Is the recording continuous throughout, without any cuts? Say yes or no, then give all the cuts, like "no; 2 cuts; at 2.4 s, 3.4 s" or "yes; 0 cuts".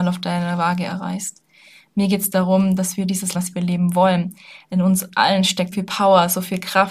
no; 2 cuts; at 3.3 s, 5.7 s